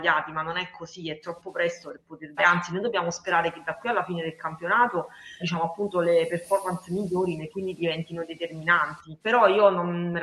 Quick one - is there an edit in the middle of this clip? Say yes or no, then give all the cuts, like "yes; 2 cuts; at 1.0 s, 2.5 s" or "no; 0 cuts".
yes; 4 cuts; at 2.4 s, 5.4 s, 7.5 s, 9.2 s